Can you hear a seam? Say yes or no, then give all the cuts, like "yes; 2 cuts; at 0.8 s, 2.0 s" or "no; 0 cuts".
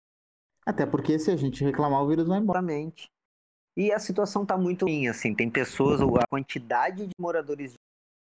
no; 0 cuts